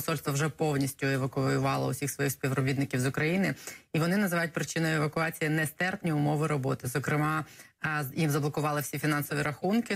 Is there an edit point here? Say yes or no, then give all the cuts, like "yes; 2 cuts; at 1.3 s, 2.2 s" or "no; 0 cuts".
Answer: no; 0 cuts